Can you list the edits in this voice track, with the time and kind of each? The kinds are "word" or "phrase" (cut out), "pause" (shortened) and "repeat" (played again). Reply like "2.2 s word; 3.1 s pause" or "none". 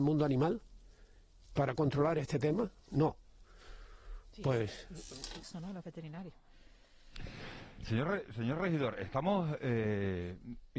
5.4 s phrase